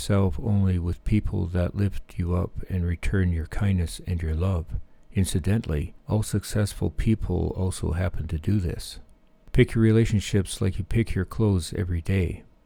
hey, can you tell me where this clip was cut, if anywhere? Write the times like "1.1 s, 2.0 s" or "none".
none